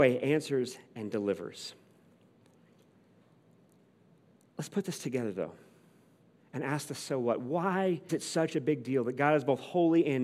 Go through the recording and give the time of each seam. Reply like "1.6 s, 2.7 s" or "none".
8.1 s